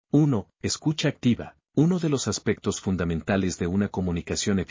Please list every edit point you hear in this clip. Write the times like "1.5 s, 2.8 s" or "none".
1.7 s